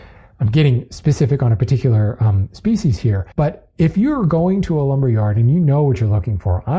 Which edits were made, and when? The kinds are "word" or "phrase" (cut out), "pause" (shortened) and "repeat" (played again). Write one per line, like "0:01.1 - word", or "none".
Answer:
0:03.3 - pause